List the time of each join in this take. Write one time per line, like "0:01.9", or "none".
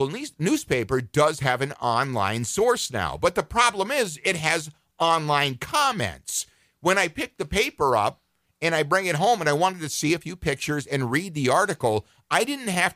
none